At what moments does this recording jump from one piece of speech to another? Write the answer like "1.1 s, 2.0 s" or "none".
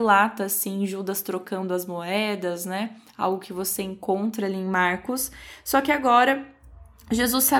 none

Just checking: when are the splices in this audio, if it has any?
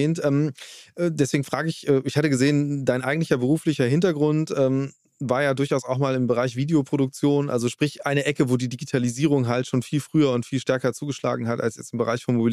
none

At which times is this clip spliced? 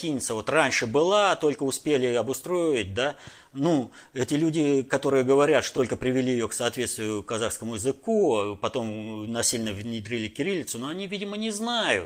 5.8 s

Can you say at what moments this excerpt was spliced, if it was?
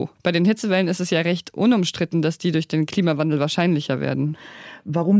none

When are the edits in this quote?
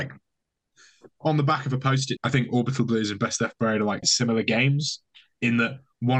2.2 s, 4.0 s

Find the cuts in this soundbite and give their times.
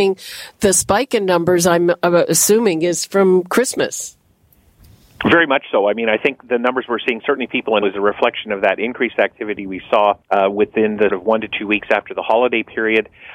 6.4 s, 7.8 s, 10.2 s, 11.1 s

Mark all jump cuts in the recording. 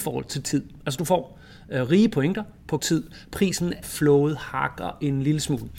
2.8 s, 3.8 s

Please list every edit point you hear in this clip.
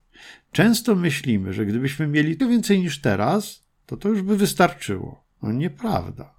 2.4 s, 5.3 s

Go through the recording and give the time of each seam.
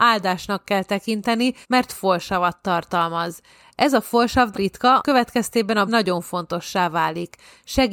1.6 s, 4.5 s, 5.0 s, 5.9 s

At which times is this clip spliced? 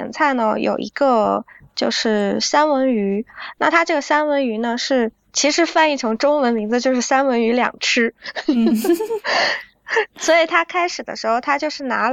none

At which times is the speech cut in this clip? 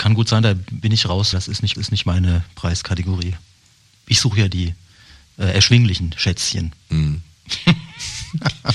1.3 s, 1.7 s

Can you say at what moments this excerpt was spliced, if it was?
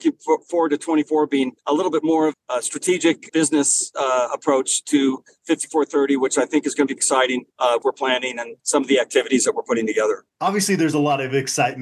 1.6 s, 2.3 s, 3.3 s, 7.0 s, 7.5 s, 7.8 s, 8.6 s, 10.3 s

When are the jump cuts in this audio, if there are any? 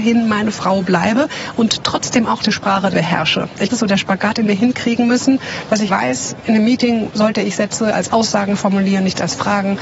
2.9 s, 3.7 s, 5.9 s

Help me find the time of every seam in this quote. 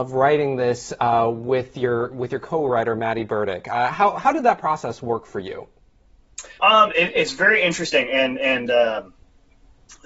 6.6 s

